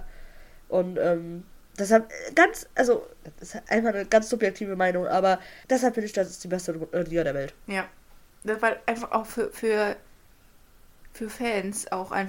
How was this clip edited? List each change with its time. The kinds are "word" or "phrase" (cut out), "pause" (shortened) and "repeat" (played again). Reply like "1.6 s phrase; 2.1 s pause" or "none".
5.6 s pause